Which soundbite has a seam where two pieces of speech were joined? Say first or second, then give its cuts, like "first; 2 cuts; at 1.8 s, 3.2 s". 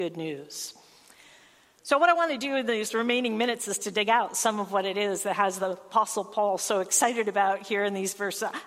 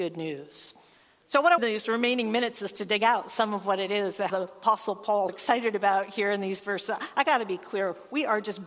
second; 4 cuts; at 0.9 s, 1.6 s, 4.3 s, 5.3 s